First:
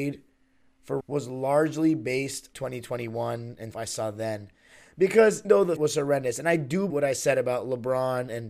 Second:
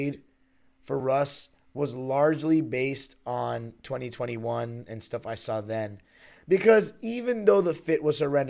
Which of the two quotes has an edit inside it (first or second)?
first